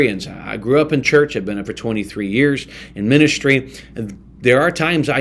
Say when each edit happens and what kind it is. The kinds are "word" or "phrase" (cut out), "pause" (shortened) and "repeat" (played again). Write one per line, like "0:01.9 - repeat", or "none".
0:01.6 - word